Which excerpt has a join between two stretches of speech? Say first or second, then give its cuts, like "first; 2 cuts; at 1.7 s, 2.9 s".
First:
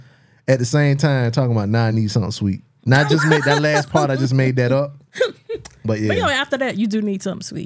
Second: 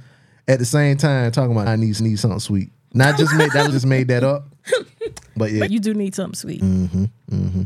second; 4 cuts; at 1.7 s, 2.0 s, 3.7 s, 5.7 s